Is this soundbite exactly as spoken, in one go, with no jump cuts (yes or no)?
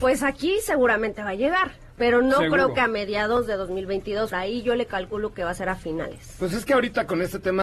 no